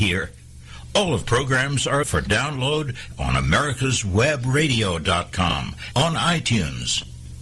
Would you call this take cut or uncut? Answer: cut